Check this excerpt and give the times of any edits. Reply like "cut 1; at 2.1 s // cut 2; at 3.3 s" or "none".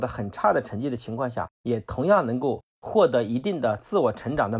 cut 1; at 1.5 s